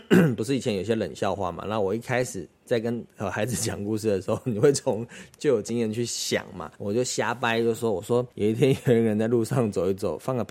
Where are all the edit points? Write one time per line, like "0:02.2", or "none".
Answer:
0:06.7
0:08.3